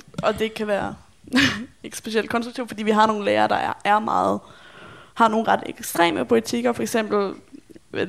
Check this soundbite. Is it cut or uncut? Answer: uncut